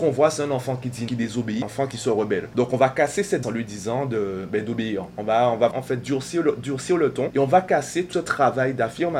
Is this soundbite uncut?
no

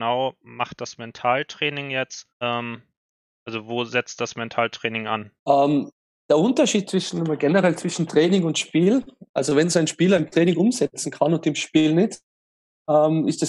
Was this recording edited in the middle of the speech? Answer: yes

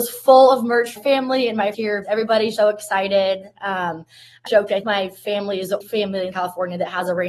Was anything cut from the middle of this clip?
yes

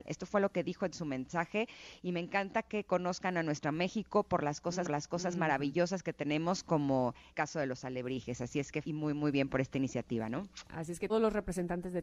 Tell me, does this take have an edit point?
yes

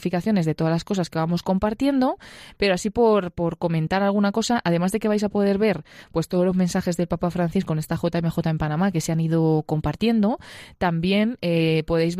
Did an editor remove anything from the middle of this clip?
no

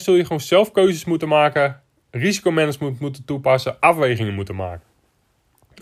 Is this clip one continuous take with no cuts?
yes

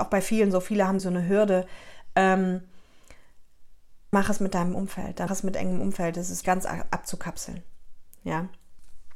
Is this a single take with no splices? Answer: no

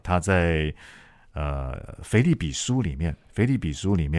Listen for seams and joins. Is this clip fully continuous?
yes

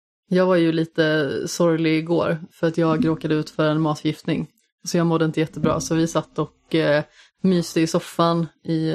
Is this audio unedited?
yes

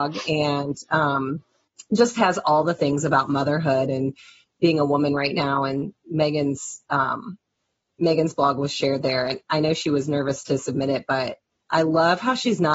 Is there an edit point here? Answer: no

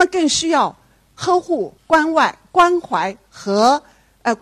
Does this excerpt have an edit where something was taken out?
yes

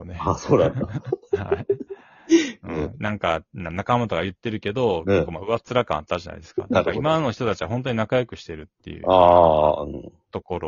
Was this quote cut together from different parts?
no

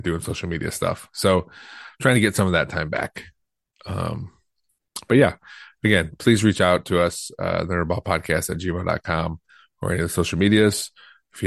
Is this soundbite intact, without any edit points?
yes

